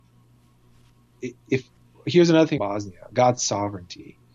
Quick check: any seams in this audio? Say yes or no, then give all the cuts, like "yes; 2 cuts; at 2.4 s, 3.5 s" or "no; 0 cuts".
yes; 1 cut; at 2.6 s